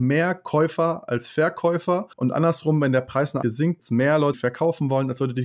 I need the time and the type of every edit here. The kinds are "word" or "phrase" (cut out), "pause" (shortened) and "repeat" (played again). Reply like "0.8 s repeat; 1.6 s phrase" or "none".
2.1 s pause; 3.4 s word; 3.8 s word; 4.3 s word